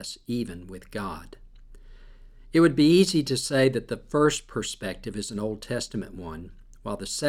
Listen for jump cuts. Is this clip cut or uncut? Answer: uncut